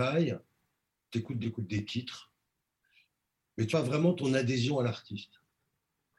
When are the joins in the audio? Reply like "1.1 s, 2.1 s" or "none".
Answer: 1.4 s, 3.7 s